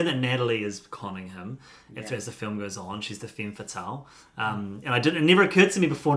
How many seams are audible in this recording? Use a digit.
0